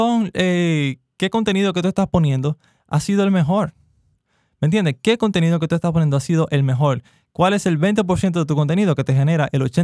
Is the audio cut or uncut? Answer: uncut